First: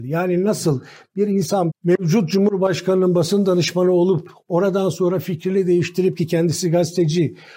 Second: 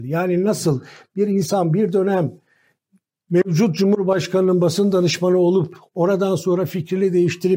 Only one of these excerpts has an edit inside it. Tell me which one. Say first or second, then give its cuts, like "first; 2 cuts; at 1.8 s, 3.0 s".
first; 1 cut; at 1.7 s